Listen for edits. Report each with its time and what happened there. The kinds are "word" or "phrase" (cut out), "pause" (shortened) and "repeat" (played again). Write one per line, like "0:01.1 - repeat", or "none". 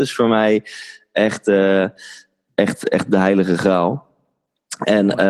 none